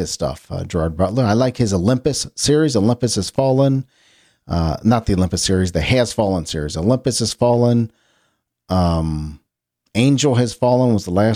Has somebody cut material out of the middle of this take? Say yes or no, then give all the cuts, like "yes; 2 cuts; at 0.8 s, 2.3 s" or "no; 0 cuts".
no; 0 cuts